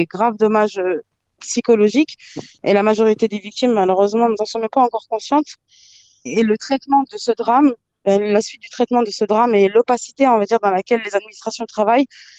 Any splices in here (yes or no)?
no